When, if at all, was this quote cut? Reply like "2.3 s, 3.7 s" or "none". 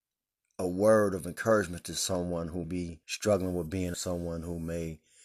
2.6 s, 3.0 s, 3.9 s